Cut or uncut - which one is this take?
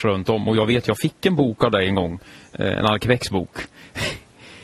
uncut